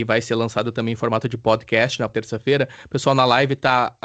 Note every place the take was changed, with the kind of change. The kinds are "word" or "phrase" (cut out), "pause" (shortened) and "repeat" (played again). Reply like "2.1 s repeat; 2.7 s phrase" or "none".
2.1 s word